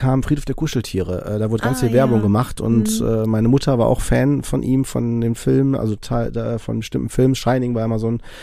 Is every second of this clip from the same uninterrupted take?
yes; 0 cuts

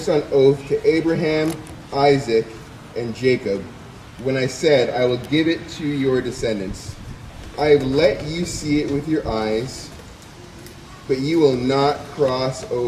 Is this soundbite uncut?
yes; 0 cuts

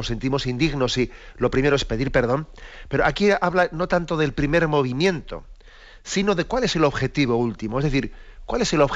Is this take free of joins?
yes; 0 cuts

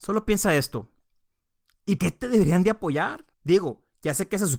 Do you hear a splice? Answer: yes; 2 cuts; at 2.0 s, 3.3 s

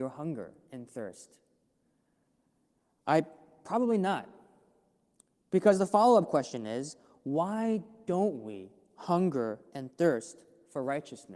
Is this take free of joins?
yes; 0 cuts

